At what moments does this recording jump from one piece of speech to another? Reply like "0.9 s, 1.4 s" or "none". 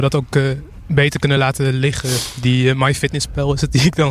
none